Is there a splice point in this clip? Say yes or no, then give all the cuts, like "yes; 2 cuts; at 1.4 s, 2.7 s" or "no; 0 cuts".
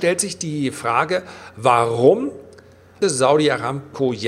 yes; 1 cut; at 3.0 s